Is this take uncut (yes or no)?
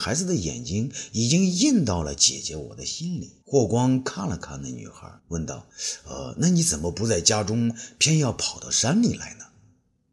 no